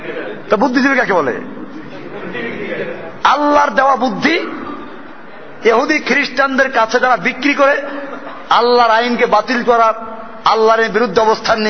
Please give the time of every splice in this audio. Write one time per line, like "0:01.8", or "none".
none